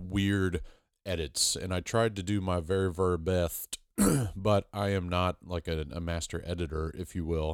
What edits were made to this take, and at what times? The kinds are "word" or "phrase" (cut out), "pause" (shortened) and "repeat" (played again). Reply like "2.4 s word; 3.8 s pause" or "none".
none